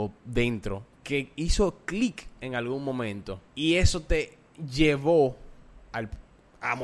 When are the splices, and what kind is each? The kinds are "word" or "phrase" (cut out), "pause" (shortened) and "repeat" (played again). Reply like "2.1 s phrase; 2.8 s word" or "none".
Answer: 0.9 s pause; 3.5 s pause